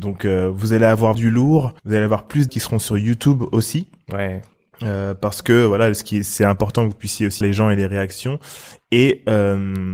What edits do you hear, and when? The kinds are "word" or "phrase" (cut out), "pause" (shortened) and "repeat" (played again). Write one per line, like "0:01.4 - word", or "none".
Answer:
0:01.1 - word
0:01.8 - pause
0:02.5 - word
0:07.4 - word